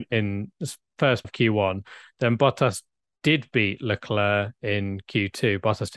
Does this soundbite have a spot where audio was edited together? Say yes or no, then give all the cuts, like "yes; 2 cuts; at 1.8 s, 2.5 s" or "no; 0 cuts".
yes; 1 cut; at 1.2 s